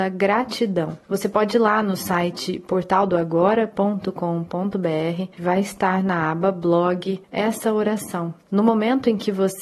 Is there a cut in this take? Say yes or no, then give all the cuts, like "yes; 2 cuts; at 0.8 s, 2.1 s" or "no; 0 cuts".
yes; 3 cuts; at 1.0 s, 5.3 s, 8.4 s